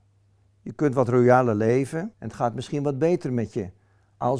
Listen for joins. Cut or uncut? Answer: cut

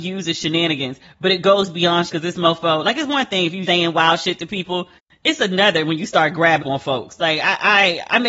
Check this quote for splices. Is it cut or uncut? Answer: cut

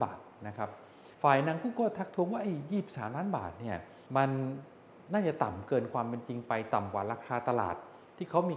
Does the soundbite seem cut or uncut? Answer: cut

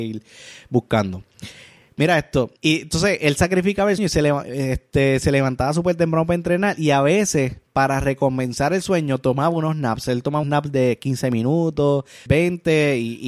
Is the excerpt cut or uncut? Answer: cut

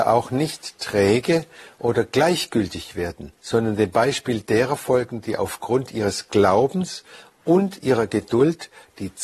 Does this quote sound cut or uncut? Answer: cut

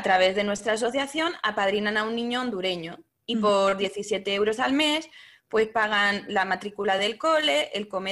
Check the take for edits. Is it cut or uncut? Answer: uncut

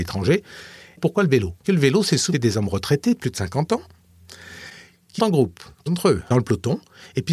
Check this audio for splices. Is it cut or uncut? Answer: cut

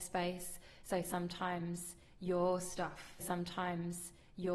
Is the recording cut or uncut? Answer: cut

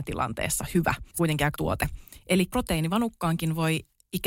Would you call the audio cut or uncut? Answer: cut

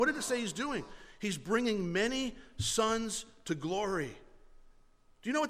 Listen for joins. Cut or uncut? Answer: uncut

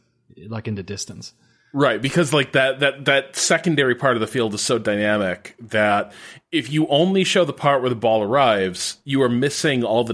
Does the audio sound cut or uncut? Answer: uncut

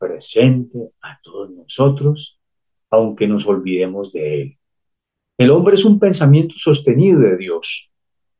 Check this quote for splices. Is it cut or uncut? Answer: uncut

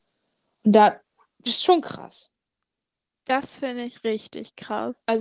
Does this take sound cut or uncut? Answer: uncut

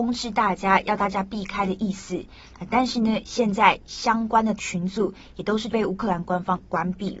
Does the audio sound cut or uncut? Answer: cut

